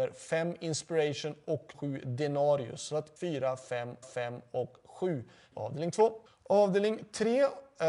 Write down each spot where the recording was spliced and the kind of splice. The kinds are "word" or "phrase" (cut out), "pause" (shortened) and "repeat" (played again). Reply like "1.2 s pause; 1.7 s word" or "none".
1.7 s word; 3.2 s phrase; 4.0 s repeat; 5.5 s word; 6.3 s pause